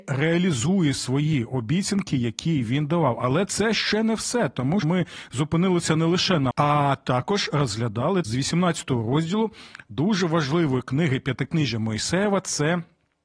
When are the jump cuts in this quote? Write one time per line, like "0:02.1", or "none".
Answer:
0:04.8
0:06.5
0:08.2